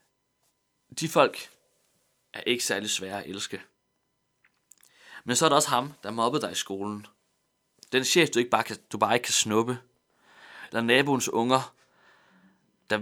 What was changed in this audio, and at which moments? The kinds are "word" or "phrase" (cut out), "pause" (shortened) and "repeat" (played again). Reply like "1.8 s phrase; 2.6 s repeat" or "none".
none